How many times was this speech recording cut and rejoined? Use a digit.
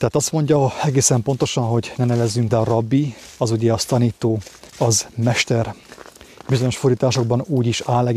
3